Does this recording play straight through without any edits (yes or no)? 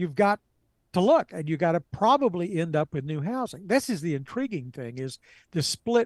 yes